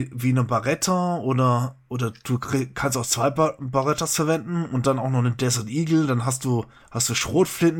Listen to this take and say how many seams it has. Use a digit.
1